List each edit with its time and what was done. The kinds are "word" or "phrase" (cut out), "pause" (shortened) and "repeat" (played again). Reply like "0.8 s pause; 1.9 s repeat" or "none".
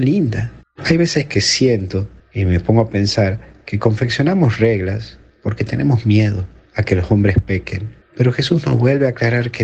none